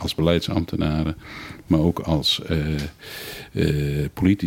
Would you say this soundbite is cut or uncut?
uncut